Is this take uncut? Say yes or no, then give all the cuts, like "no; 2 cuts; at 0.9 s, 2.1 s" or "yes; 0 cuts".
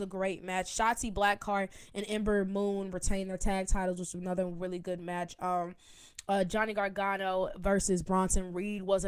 yes; 0 cuts